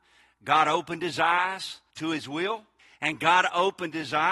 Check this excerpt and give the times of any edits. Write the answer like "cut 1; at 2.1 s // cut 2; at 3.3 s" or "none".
cut 1; at 1.9 s // cut 2; at 2.8 s